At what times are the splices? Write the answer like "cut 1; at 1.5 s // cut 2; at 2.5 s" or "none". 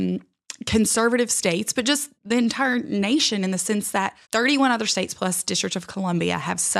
cut 1; at 2.1 s // cut 2; at 4.2 s